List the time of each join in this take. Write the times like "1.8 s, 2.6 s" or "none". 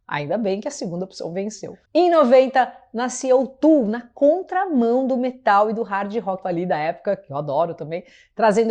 1.9 s, 6.4 s